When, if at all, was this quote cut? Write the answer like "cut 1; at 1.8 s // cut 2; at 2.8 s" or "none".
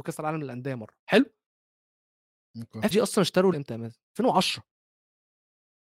cut 1; at 1.0 s // cut 2; at 2.9 s // cut 3; at 3.5 s // cut 4; at 4.1 s